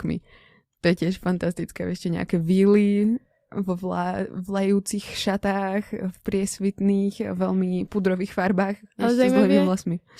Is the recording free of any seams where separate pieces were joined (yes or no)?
yes